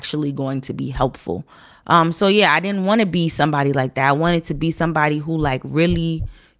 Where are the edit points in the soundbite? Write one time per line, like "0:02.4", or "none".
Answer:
none